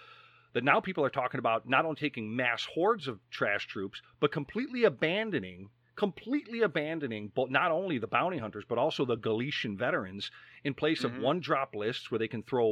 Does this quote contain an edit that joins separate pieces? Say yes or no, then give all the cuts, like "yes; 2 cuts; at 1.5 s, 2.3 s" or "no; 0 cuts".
no; 0 cuts